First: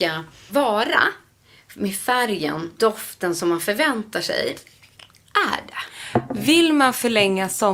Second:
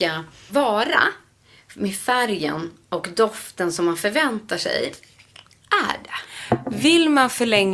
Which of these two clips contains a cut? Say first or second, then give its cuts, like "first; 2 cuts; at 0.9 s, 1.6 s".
first; 1 cut; at 2.8 s